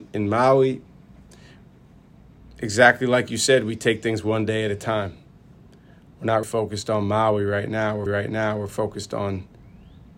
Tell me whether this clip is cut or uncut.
cut